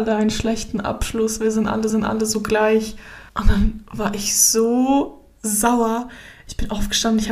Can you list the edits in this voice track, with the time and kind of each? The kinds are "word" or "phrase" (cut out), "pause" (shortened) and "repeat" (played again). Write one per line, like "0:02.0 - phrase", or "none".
0:01.9 - repeat
0:03.3 - pause